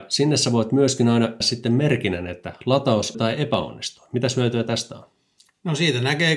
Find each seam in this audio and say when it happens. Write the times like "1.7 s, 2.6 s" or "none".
1.4 s, 3.1 s

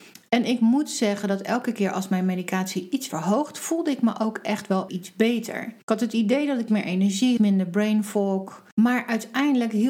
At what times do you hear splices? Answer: 3.1 s, 4.9 s, 5.8 s, 6.7 s, 7.4 s, 8.7 s

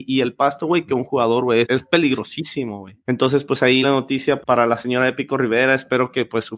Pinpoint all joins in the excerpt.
1.6 s, 3.0 s, 3.8 s, 4.4 s

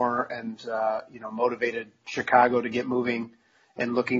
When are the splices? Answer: none

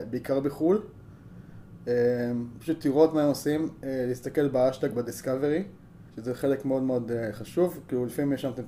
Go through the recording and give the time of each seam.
6.1 s

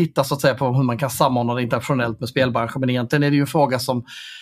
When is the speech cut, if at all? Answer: none

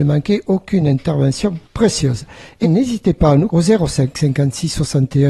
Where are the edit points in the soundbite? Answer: 1.6 s, 2.6 s, 3.5 s

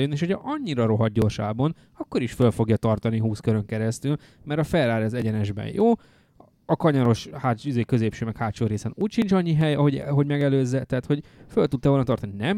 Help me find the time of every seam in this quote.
none

